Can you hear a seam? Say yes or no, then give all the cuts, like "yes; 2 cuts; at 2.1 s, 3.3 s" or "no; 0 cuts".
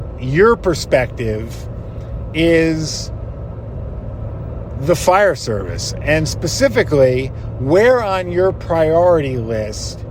no; 0 cuts